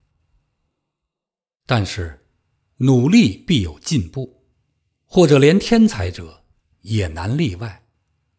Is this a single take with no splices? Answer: yes; 0 cuts

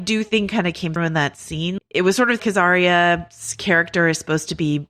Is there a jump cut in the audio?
yes; 3 cuts; at 1.0 s, 1.8 s, 2.4 s

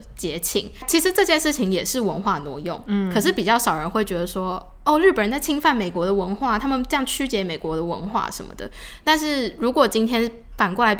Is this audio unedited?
yes; 0 cuts

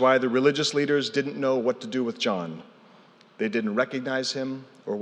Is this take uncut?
yes; 0 cuts

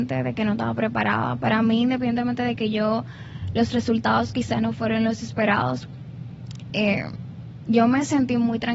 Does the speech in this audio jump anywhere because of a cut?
no; 0 cuts

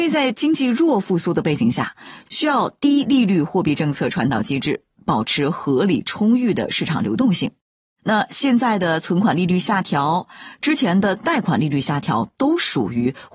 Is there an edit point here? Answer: no; 0 cuts

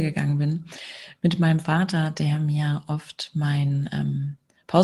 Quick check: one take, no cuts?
yes; 0 cuts

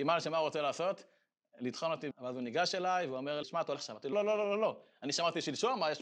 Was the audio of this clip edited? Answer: yes; 4 cuts; at 2.1 s, 3.4 s, 3.8 s, 4.1 s

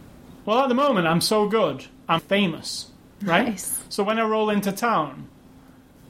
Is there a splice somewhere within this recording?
yes; 1 cut; at 2.2 s

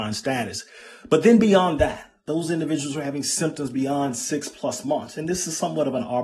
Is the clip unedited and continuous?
yes; 0 cuts

